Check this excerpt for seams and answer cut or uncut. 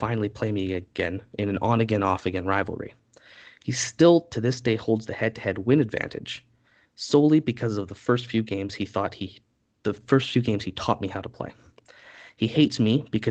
uncut